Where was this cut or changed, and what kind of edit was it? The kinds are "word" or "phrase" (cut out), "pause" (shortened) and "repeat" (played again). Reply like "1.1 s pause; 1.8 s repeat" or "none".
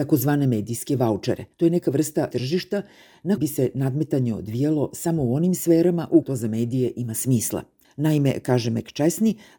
1.5 s pause; 2.3 s word; 3.4 s word; 6.2 s word; 7.8 s pause